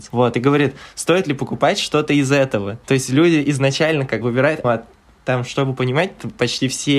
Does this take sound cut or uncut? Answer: cut